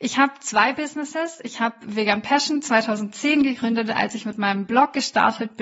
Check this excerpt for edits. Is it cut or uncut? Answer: uncut